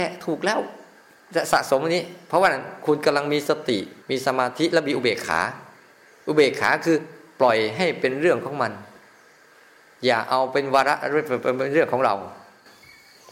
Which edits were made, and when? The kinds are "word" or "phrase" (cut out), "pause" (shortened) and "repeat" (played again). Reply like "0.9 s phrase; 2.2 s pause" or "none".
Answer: 4.0 s pause